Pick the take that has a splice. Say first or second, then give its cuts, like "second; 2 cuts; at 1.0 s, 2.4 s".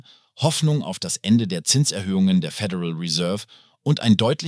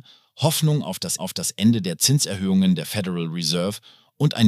second; 1 cut; at 1.2 s